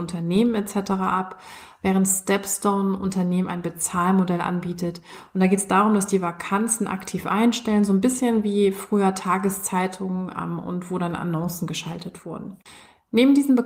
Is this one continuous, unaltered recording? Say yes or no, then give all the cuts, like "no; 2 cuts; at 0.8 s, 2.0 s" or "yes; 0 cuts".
yes; 0 cuts